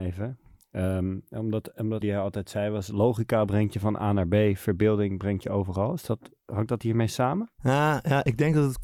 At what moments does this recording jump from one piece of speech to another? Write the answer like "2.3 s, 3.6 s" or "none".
2.0 s